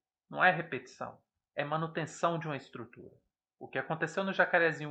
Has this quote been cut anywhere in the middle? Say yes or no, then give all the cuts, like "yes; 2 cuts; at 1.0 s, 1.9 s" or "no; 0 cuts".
no; 0 cuts